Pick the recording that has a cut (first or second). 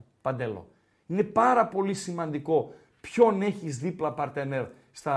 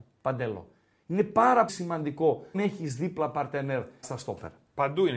second